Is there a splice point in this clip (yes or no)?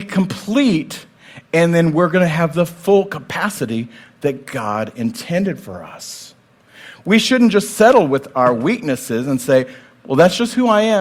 no